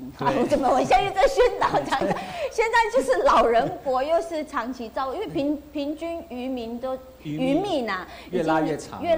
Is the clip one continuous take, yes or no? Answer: yes